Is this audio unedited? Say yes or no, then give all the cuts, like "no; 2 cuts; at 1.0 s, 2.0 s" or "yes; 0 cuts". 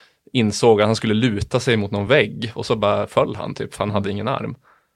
yes; 0 cuts